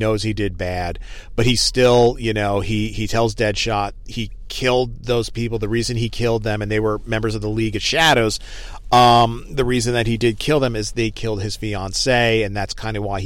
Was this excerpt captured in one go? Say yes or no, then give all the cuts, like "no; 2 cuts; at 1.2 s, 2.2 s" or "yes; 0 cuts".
yes; 0 cuts